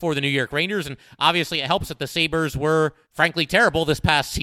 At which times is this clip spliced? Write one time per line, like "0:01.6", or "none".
0:03.0

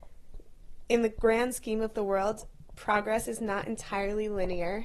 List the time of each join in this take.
none

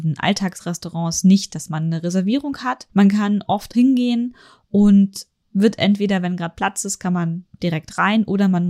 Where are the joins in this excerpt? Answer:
0:01.5
0:02.9
0:03.7

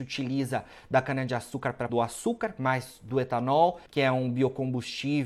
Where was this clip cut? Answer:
0:01.9
0:03.9

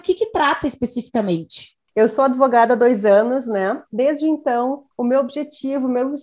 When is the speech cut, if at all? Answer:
0:03.9
0:04.9

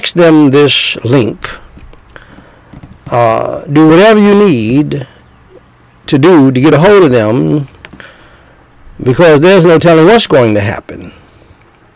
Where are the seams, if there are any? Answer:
none

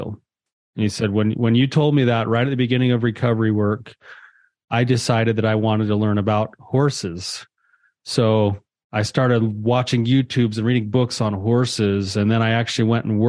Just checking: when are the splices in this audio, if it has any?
none

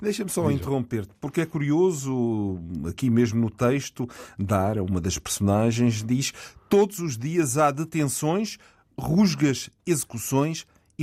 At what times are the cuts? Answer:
none

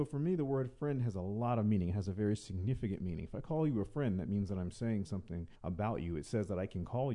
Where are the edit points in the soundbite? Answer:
0:05.5

